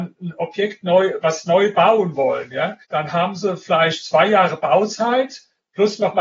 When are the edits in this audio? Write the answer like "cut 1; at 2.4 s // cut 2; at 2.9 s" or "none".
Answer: cut 1; at 2.8 s